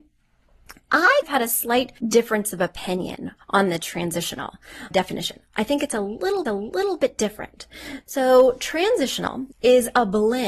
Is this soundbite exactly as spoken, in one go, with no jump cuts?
no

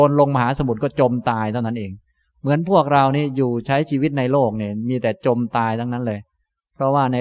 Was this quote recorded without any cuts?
yes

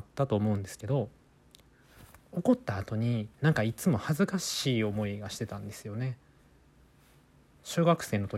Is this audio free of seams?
no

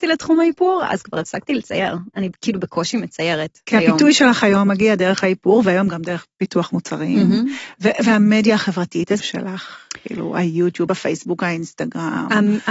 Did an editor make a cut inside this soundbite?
yes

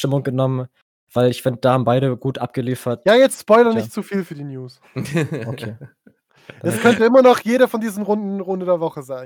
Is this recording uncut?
yes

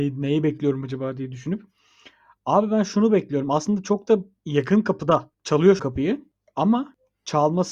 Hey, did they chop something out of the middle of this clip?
yes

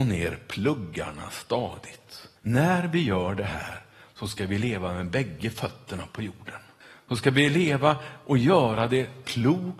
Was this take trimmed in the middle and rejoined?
yes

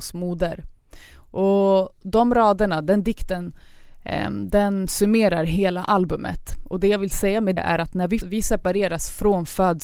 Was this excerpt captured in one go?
no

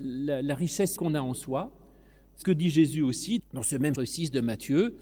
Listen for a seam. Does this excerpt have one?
yes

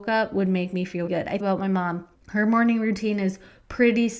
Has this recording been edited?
yes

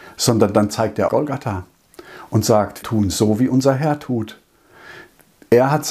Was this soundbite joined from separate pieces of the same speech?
yes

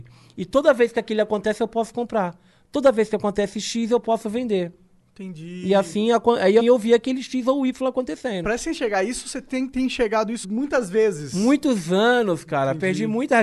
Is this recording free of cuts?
no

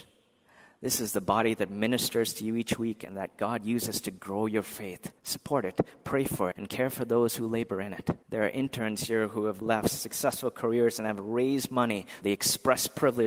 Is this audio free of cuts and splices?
no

